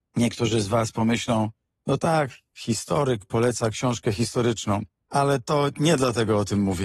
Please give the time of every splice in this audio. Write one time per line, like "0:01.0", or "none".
none